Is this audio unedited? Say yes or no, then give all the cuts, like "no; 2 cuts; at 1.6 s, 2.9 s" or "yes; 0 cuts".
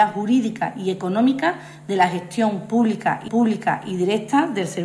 no; 1 cut; at 3.3 s